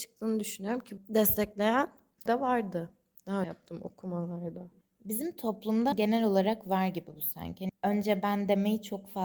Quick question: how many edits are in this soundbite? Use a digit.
6